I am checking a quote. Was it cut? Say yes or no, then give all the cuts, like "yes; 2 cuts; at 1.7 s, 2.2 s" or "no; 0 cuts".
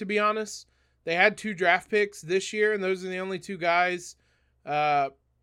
no; 0 cuts